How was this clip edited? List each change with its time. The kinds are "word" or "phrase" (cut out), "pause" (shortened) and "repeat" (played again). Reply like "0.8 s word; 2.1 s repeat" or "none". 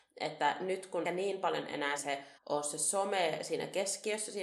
1.0 s phrase; 2.0 s word; 2.4 s pause